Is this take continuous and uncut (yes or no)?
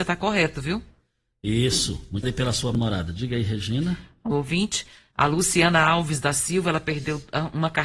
no